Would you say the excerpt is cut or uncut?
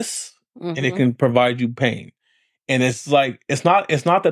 uncut